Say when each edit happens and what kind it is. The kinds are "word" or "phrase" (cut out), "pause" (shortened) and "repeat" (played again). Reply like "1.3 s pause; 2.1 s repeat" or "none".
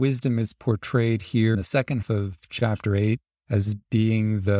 1.5 s word; 2.0 s word; 3.3 s pause